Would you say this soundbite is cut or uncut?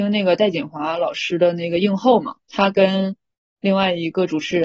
cut